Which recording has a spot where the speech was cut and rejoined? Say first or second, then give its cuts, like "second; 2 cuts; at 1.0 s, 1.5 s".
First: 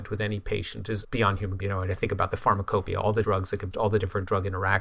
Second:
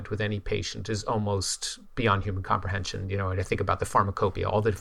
first; 4 cuts; at 1.0 s, 1.6 s, 3.2 s, 3.7 s